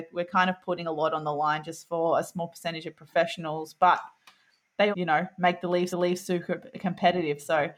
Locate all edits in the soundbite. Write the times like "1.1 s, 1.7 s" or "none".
4.9 s, 5.9 s